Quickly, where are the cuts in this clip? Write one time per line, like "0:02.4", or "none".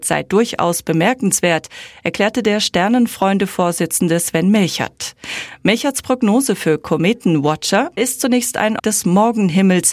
0:08.0
0:08.8